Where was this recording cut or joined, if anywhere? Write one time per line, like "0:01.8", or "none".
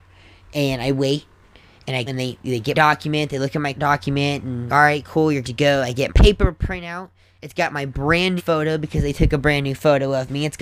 0:02.1
0:02.7
0:03.7
0:04.7
0:05.4
0:06.1
0:08.4